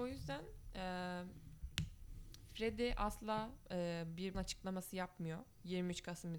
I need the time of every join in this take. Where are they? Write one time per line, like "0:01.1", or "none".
0:03.6
0:04.3